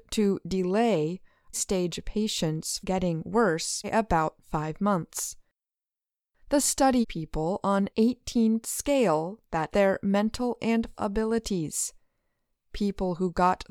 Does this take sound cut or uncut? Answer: cut